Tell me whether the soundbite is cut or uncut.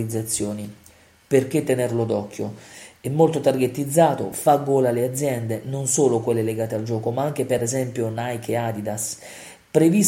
uncut